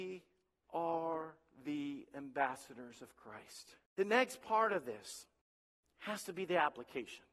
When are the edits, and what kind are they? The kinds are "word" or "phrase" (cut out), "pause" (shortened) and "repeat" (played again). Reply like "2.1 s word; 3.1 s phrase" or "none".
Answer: 3.9 s pause; 5.4 s pause